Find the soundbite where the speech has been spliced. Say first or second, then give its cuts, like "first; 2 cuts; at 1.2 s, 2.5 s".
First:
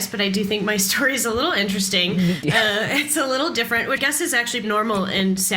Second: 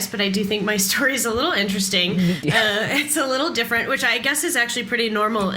first; 2 cuts; at 4.0 s, 4.6 s